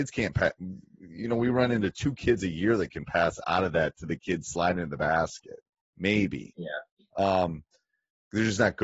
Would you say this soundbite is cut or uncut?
uncut